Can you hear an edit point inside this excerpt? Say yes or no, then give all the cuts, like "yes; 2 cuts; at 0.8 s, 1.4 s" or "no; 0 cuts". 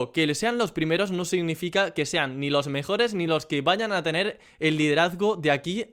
no; 0 cuts